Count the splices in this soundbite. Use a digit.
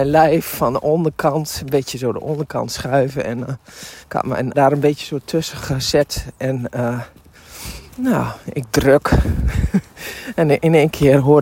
3